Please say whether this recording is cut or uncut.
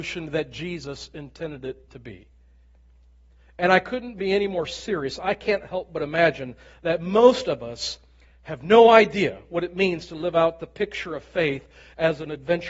uncut